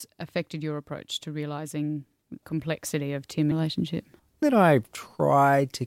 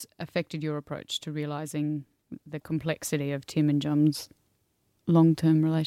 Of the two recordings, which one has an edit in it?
first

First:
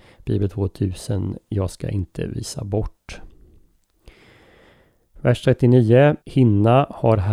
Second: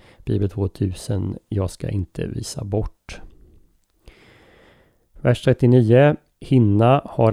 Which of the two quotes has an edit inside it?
first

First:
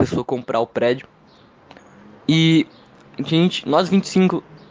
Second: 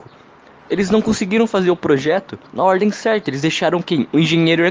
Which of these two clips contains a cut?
second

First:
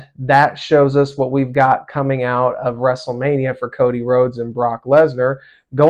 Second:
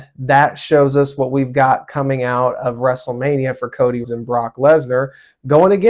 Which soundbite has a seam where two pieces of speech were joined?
second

